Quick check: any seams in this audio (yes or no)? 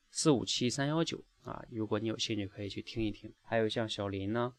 yes